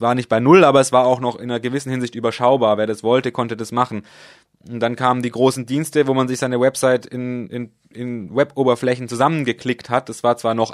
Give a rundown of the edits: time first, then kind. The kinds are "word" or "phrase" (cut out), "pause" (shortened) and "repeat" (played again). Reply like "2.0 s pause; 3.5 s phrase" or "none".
7.5 s word

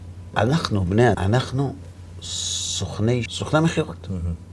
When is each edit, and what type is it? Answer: 1.1 s word; 3.3 s word

